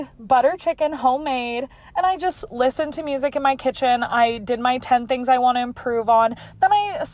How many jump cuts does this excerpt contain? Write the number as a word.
zero